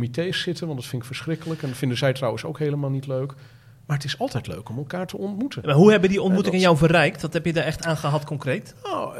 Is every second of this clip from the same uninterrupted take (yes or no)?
yes